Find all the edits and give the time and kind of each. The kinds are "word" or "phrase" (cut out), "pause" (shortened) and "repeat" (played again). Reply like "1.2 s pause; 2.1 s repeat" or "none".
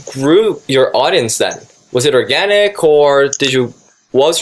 none